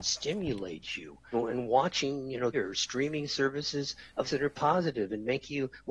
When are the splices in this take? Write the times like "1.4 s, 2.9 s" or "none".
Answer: 1.3 s, 2.5 s, 4.2 s